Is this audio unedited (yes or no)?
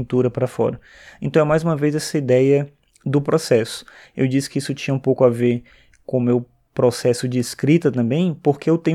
yes